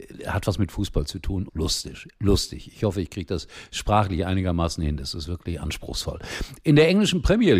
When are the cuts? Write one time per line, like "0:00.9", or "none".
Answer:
0:01.5